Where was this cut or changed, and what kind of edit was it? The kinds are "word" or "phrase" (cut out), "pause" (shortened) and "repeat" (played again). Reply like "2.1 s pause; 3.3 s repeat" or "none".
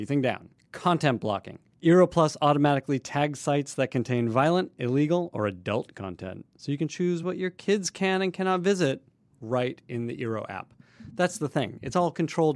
none